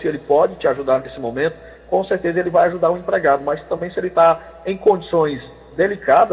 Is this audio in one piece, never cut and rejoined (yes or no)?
yes